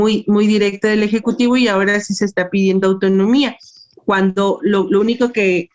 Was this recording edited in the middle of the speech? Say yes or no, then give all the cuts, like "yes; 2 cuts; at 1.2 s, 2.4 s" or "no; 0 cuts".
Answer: no; 0 cuts